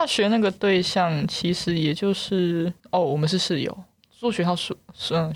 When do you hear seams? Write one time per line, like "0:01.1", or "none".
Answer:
0:02.8
0:04.0